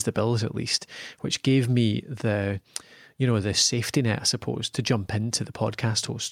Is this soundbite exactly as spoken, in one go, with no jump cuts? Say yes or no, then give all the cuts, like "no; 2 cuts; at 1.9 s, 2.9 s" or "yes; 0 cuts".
yes; 0 cuts